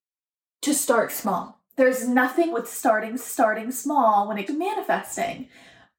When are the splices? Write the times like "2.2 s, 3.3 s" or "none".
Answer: 1.7 s, 2.5 s, 3.2 s, 4.5 s